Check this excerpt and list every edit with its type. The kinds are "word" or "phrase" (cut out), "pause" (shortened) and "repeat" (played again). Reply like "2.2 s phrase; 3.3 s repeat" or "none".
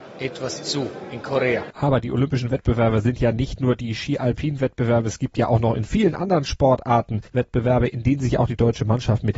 1.7 s pause; 7.3 s pause